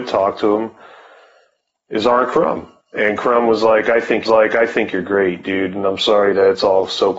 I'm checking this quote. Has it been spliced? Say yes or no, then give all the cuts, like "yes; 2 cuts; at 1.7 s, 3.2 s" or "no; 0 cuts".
yes; 1 cut; at 4.3 s